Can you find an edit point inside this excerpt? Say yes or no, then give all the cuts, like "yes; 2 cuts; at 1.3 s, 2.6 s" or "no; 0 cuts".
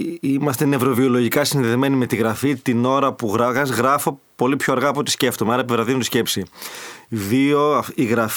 no; 0 cuts